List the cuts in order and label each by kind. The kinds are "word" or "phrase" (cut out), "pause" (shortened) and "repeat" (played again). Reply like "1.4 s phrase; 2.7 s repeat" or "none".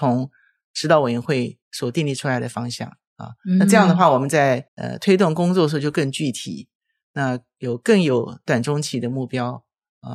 1.6 s pause; 4.7 s pause